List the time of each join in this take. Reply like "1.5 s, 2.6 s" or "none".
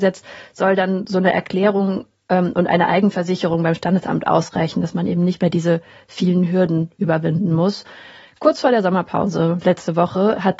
none